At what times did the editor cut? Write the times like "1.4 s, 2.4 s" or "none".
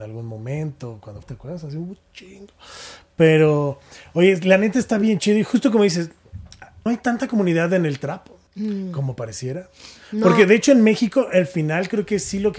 1.2 s, 6.9 s, 8.5 s